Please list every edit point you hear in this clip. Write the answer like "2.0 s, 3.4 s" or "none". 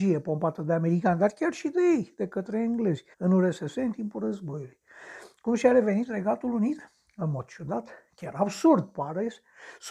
3.1 s